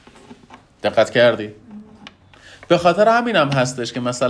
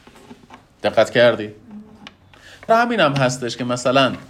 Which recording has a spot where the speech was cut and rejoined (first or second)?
second